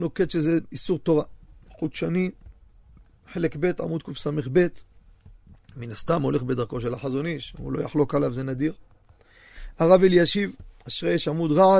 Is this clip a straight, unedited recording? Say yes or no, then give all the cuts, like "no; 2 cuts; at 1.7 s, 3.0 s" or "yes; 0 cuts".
yes; 0 cuts